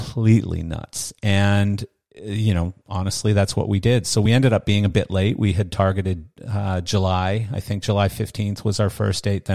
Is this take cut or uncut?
uncut